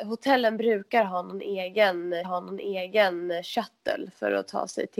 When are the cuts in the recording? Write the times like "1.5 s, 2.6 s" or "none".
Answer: 2.2 s